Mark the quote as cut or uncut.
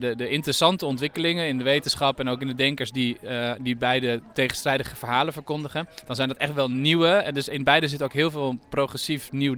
uncut